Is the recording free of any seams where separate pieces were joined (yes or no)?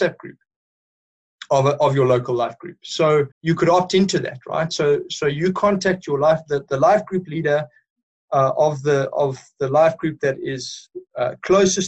no